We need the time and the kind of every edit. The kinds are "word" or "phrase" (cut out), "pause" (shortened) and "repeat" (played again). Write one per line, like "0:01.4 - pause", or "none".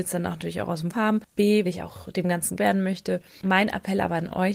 0:00.9 - word
0:01.7 - word
0:02.6 - word